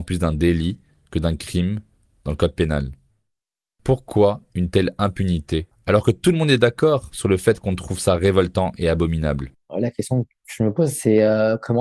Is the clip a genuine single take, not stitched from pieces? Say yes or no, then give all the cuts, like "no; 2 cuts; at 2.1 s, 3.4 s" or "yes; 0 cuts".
yes; 0 cuts